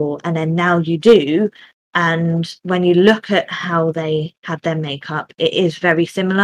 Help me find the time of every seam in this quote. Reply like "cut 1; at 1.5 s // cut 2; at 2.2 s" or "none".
none